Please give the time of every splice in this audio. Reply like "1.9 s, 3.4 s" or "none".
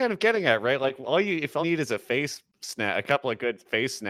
1.6 s